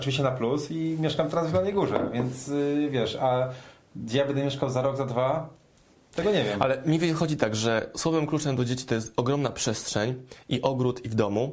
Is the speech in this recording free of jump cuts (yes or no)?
yes